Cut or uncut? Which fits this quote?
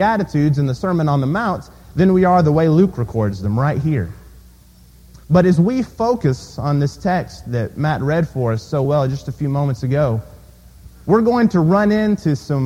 uncut